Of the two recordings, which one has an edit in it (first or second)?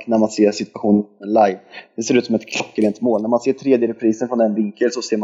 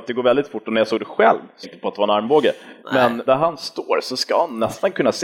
second